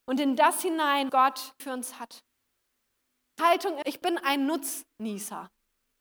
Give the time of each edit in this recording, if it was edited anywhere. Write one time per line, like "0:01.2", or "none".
0:01.1
0:01.6
0:03.4
0:03.8